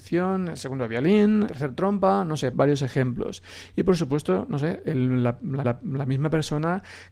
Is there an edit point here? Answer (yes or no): yes